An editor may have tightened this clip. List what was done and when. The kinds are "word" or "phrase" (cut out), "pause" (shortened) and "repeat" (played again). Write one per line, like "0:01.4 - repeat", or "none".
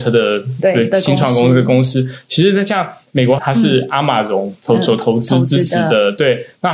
0:03.4 - phrase